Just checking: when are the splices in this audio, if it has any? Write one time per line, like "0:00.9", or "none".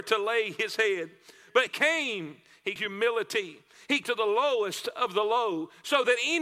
0:01.7
0:02.8
0:04.0